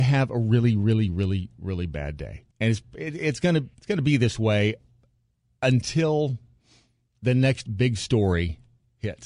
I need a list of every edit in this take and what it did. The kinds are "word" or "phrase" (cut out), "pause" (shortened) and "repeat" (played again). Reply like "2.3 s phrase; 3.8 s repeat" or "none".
2.5 s pause; 3.7 s pause